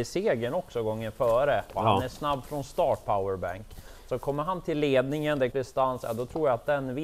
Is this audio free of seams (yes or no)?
no